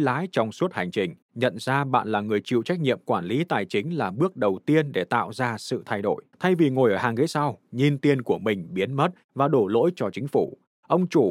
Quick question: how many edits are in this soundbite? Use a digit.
2